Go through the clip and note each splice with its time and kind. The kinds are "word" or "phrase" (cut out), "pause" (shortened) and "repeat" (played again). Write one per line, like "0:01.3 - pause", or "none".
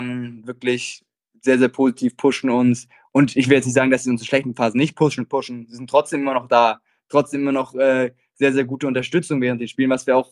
none